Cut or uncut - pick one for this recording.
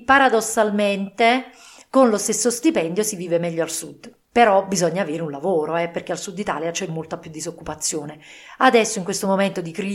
uncut